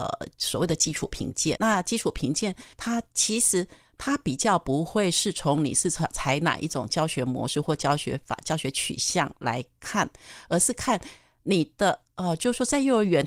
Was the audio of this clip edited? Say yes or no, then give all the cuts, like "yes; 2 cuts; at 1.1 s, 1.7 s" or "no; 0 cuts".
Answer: yes; 2 cuts; at 1.6 s, 2.7 s